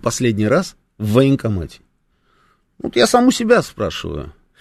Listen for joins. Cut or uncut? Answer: uncut